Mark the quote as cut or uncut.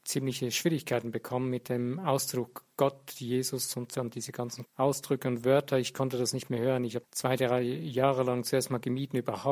cut